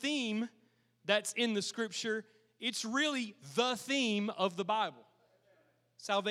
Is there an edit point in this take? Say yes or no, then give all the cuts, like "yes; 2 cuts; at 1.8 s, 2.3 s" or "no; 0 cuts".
no; 0 cuts